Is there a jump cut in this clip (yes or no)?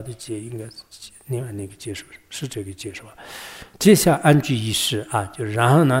yes